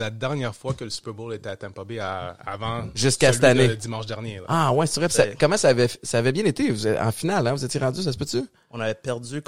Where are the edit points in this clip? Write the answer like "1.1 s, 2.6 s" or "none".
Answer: none